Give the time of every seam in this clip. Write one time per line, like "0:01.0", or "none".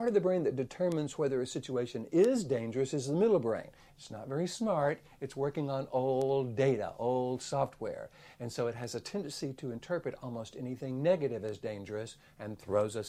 none